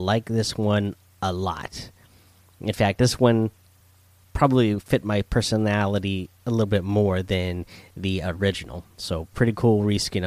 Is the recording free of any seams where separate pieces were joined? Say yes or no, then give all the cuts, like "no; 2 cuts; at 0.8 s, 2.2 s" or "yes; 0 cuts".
yes; 0 cuts